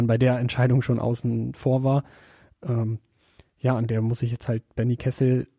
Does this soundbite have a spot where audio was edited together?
no; 0 cuts

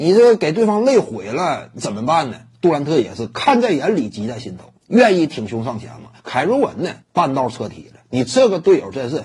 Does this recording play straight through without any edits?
no; 3 cuts; at 4.8 s, 6.2 s, 7.0 s

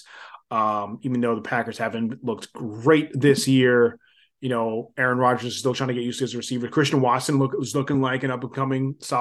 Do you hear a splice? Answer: no; 0 cuts

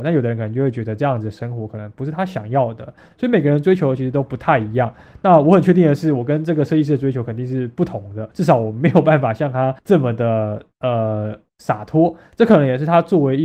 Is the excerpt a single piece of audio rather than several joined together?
no; 2 cuts; at 8.3 s, 9.8 s

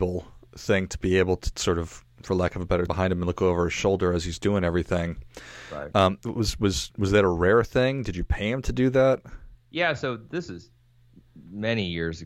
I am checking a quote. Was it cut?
yes; 3 cuts; at 1.5 s, 2.9 s, 9.6 s

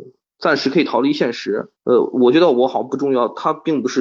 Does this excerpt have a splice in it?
yes; 1 cut; at 1.8 s

